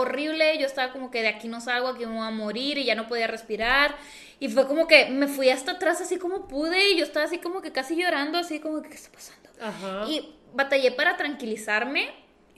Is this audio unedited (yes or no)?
yes